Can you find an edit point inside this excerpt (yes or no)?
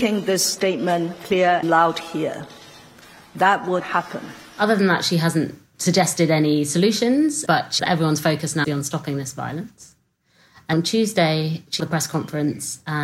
yes